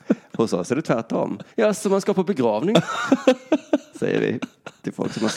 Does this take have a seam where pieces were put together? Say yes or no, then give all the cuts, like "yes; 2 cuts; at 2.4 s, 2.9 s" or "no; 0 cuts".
yes; 1 cut; at 1.5 s